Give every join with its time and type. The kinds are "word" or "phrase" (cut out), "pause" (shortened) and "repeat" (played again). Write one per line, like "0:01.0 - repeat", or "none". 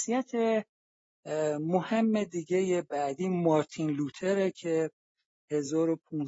none